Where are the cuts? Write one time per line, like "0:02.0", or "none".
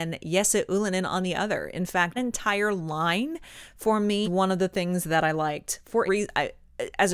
0:02.2
0:04.2
0:06.1